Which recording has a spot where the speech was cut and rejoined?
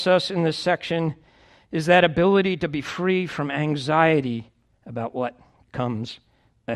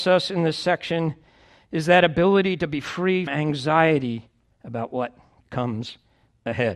second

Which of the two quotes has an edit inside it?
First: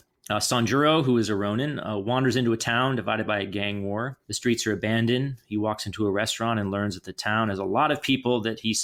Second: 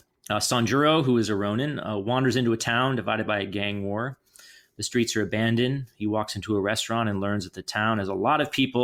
first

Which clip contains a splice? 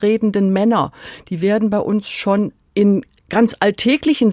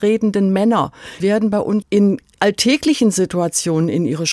second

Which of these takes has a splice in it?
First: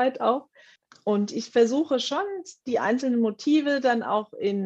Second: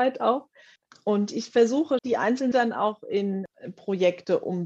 second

